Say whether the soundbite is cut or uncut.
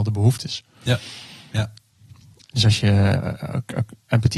uncut